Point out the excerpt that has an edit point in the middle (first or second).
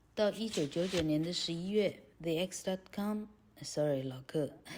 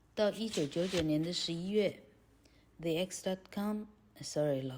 first